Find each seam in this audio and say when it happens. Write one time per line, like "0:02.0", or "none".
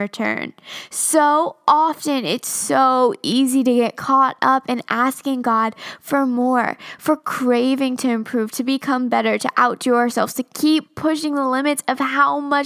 none